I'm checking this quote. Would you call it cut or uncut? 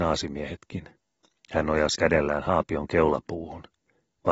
cut